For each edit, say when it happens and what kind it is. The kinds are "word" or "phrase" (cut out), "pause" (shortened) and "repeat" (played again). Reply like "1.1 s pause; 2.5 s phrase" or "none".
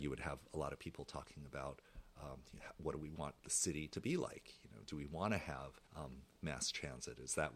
3.4 s pause; 5.9 s pause